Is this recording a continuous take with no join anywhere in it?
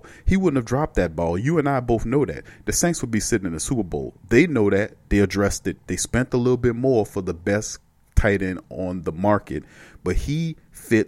yes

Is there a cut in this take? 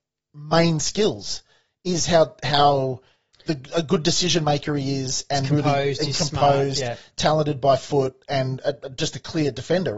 no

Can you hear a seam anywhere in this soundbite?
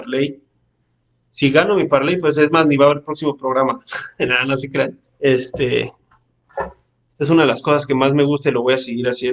yes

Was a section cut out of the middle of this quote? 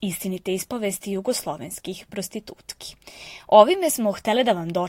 no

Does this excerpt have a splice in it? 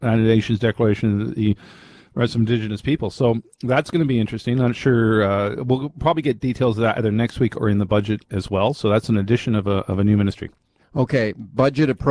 no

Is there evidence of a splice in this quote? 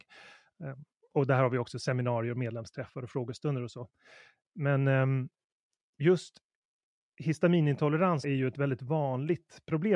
no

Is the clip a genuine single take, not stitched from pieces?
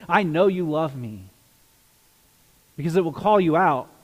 yes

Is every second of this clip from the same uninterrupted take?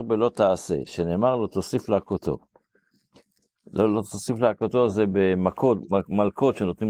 yes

